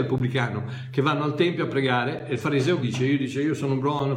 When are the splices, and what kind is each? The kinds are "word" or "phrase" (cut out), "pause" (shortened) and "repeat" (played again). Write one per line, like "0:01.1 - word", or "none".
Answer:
0:02.8 - word